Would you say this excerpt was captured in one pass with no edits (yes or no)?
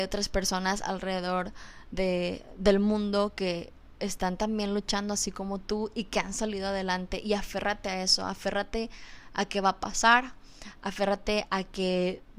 yes